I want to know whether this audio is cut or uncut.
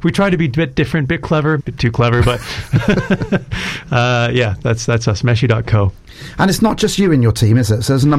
cut